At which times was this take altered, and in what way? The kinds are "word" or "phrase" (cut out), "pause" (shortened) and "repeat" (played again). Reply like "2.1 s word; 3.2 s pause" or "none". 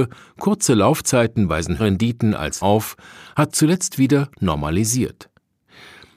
1.8 s word; 2.6 s word; 3.5 s word; 3.9 s word